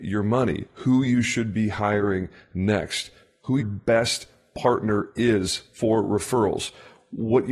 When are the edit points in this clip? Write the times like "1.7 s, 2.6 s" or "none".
3.6 s